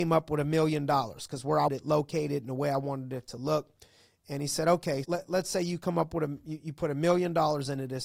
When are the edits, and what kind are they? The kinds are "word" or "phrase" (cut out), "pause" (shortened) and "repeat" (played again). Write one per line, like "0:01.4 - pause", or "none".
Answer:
0:01.7 - word
0:05.0 - word